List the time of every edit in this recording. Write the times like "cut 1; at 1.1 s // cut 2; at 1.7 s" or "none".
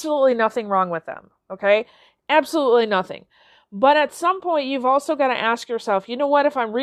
none

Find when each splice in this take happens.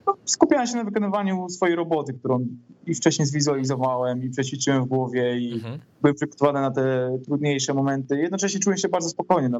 none

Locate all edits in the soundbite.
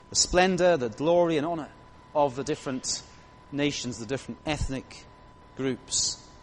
none

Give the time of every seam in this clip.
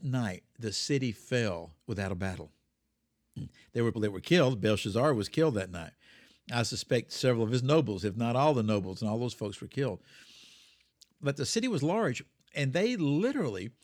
cut 1; at 1.8 s // cut 2; at 3.9 s

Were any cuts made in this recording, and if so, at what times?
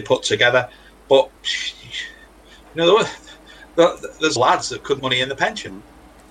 cut 1; at 1.4 s // cut 2; at 4.4 s // cut 3; at 5.0 s

